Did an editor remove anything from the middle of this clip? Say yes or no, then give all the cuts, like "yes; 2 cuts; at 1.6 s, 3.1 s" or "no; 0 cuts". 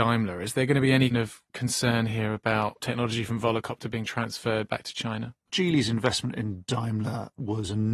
yes; 1 cut; at 1.1 s